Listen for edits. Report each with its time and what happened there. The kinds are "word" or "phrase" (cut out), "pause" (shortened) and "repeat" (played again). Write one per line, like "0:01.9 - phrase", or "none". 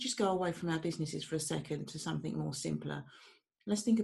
none